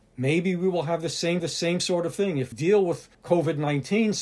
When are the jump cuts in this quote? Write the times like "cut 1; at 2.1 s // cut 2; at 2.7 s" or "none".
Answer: cut 1; at 1.4 s // cut 2; at 2.5 s // cut 3; at 3.1 s